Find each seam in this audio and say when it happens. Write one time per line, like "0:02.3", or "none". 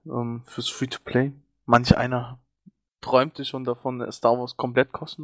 none